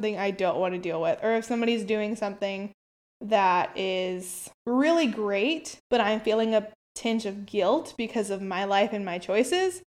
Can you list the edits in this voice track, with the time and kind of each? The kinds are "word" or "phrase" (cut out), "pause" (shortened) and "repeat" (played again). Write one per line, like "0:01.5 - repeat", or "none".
0:02.8 - pause
0:04.6 - pause
0:05.8 - pause